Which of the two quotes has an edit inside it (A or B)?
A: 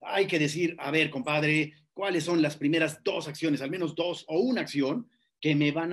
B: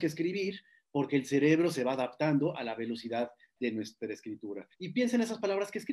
B